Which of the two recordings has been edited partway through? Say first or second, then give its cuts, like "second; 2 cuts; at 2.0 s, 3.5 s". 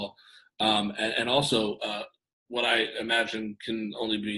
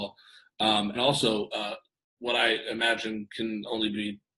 second; 1 cut; at 1.0 s